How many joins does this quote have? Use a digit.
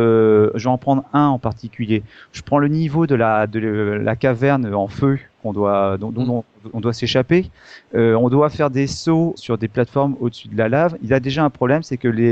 2